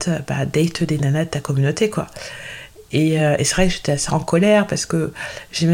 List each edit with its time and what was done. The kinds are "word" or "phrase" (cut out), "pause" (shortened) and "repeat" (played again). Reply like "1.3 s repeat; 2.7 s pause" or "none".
none